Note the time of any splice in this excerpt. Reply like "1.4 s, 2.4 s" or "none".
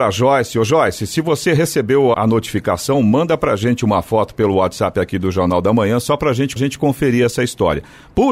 2.1 s, 6.6 s